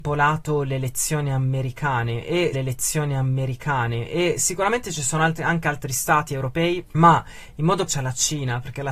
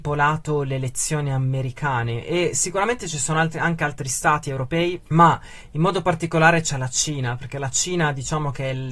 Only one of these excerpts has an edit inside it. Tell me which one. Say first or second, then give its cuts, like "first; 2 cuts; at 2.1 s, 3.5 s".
first; 2 cuts; at 2.5 s, 7.9 s